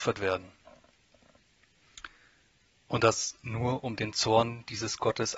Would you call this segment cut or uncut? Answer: uncut